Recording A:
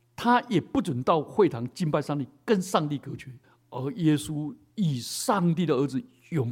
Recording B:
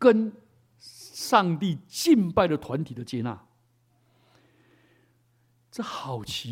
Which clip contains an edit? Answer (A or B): A